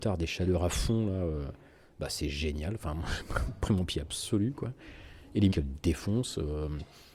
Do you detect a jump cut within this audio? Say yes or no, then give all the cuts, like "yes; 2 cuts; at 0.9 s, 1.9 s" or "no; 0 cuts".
yes; 1 cut; at 5.5 s